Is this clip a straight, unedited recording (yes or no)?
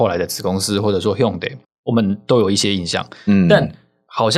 yes